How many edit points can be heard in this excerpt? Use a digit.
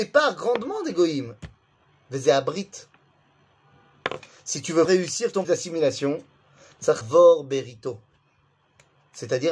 3